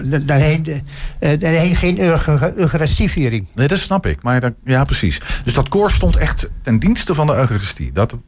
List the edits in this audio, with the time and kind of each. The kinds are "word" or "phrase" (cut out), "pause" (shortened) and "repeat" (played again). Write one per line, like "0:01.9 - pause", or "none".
none